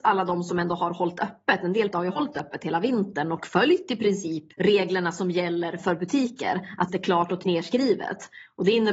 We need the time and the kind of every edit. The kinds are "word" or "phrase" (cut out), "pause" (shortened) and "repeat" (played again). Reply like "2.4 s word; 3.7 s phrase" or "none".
1.9 s word; 4.5 s pause; 5.8 s word; 6.9 s phrase; 7.4 s word